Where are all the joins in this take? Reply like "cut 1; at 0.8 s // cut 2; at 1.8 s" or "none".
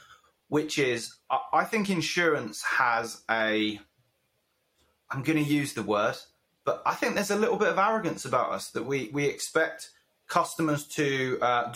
none